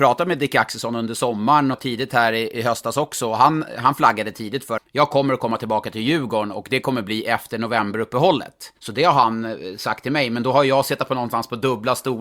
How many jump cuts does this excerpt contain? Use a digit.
3